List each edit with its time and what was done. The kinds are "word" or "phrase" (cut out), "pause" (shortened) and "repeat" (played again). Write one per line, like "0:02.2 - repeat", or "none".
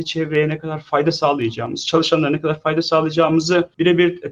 none